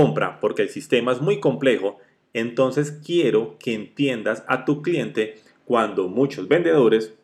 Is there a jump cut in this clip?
no; 0 cuts

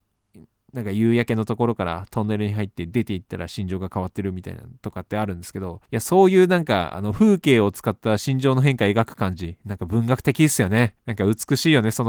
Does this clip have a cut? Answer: yes; 2 cuts; at 5.9 s, 11.0 s

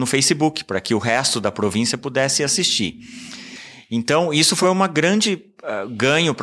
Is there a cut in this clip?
no; 0 cuts

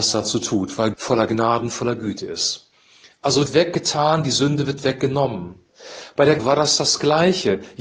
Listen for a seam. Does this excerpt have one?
yes; 3 cuts; at 0.9 s, 3.5 s, 6.4 s

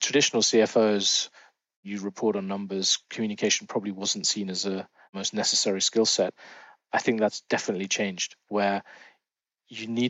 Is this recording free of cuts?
yes; 0 cuts

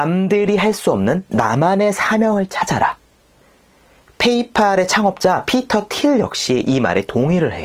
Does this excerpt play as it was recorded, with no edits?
yes; 0 cuts

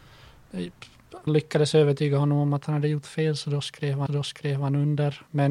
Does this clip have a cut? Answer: yes; 2 cuts; at 1.3 s, 4.1 s

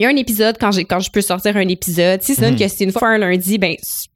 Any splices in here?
yes; 2 cuts; at 2.4 s, 3.0 s

